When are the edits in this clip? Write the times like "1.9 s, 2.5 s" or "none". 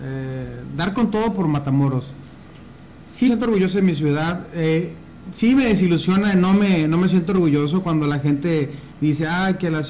3.3 s